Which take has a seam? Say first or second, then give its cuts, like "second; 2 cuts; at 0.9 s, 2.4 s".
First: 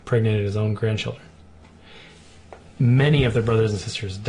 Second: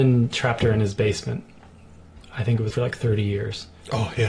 second; 1 cut; at 2.7 s